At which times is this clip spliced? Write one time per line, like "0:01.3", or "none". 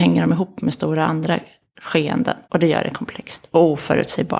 0:02.4